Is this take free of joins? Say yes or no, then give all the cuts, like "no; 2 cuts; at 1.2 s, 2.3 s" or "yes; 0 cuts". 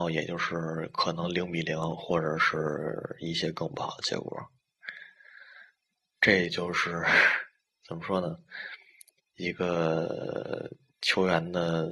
yes; 0 cuts